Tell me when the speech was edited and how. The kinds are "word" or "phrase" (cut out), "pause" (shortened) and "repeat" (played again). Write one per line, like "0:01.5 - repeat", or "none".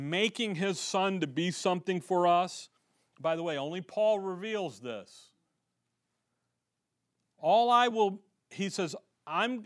none